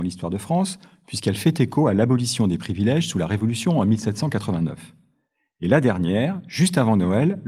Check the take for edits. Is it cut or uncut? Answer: uncut